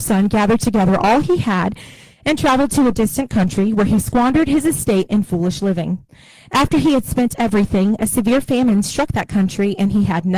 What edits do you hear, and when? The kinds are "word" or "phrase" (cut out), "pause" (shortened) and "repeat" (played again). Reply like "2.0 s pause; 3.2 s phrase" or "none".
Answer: none

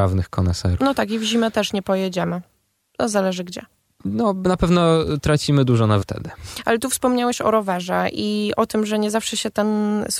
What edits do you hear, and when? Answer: 6.0 s word

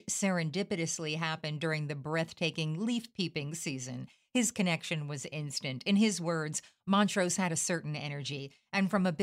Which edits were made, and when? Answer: none

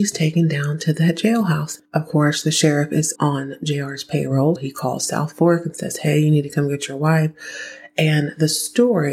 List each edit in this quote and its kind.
1.8 s pause; 3.1 s word; 4.6 s word

